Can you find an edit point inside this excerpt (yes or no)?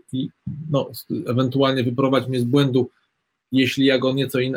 no